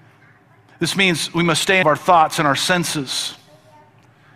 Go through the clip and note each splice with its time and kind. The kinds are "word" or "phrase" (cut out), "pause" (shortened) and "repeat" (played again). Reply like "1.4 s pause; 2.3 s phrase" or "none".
1.8 s phrase